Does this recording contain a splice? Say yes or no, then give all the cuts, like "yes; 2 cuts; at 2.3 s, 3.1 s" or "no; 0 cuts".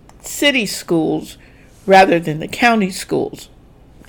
no; 0 cuts